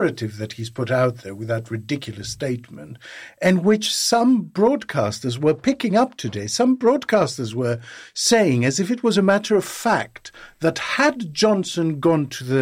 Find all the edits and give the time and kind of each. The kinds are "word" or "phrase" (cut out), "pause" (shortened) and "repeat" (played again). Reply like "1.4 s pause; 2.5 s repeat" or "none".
none